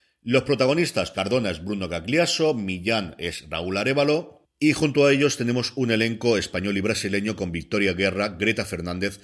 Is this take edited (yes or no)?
yes